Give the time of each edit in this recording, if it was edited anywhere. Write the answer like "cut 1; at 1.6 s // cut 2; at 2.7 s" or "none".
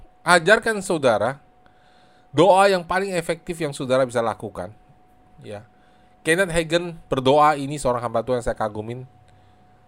none